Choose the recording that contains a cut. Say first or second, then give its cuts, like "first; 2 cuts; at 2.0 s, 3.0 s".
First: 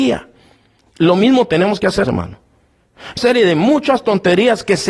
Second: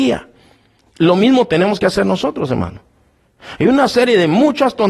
first; 2 cuts; at 2.0 s, 3.2 s